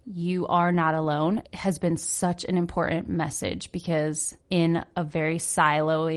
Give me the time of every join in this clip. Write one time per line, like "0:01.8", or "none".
0:01.4
0:04.4